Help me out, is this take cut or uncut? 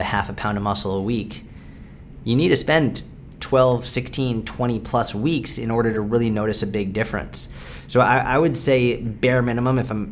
uncut